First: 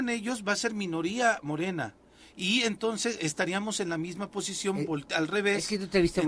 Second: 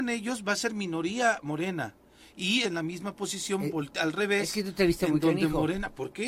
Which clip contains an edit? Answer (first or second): second